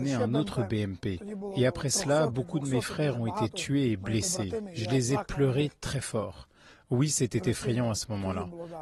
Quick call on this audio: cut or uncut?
uncut